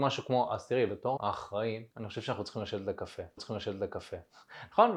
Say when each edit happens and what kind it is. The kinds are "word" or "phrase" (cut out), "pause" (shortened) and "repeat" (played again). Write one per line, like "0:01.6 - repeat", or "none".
0:01.2 - word
0:01.9 - pause
0:03.4 - repeat